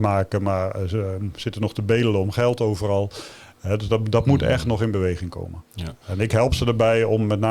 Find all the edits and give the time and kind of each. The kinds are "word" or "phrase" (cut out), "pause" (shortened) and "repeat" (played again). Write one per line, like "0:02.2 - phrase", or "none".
0:05.7 - pause